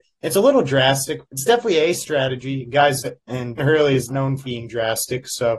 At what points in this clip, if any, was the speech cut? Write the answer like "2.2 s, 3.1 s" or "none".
1.2 s, 3.0 s, 3.6 s, 4.1 s, 4.4 s